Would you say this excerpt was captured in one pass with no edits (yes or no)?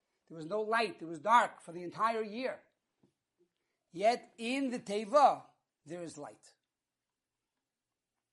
yes